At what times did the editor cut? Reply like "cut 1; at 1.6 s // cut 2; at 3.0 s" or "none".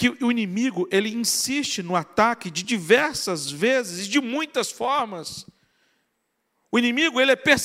none